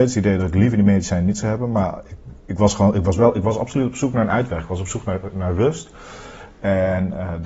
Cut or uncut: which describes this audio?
uncut